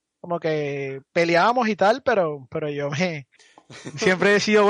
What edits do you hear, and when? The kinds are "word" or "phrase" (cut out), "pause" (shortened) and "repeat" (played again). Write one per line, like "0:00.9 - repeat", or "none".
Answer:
0:01.1 - pause